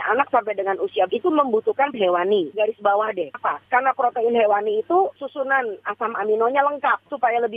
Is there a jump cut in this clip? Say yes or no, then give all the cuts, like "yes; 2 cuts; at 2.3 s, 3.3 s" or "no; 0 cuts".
yes; 4 cuts; at 1.1 s, 1.9 s, 2.5 s, 3.3 s